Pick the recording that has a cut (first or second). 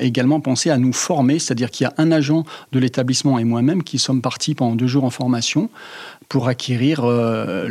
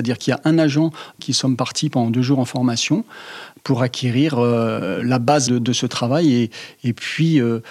second